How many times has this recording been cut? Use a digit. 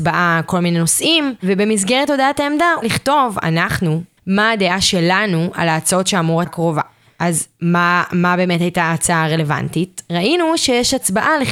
3